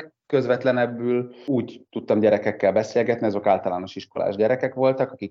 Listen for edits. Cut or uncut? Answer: uncut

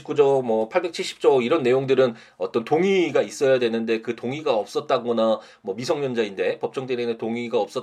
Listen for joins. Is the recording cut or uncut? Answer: uncut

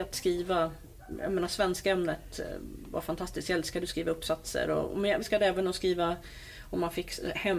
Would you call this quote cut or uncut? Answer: cut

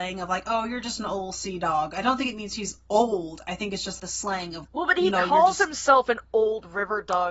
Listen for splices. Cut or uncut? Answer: cut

